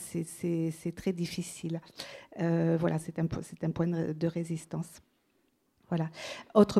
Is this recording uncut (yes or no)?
yes